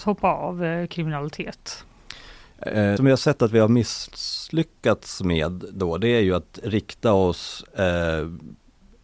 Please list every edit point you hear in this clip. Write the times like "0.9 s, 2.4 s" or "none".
3.0 s